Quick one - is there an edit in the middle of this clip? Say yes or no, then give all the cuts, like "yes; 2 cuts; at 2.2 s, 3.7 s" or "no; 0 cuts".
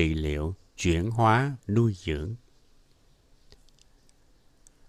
yes; 1 cut; at 1.6 s